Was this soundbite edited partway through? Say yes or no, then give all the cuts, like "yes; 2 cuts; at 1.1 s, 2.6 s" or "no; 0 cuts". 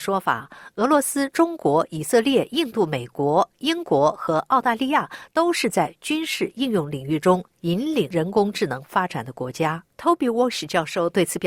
yes; 1 cut; at 9.9 s